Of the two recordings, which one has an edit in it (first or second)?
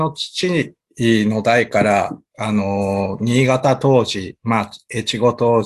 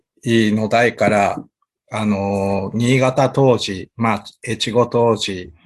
first